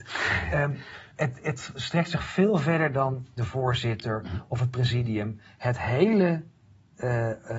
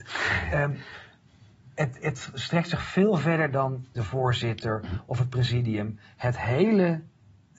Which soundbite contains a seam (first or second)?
first